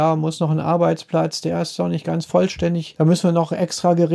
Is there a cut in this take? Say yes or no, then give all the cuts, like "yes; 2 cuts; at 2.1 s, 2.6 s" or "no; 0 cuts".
no; 0 cuts